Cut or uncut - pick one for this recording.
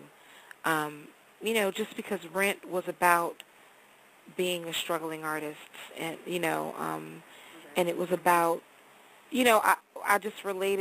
uncut